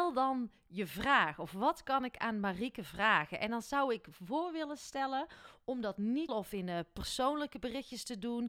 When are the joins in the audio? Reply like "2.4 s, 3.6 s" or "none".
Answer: 6.3 s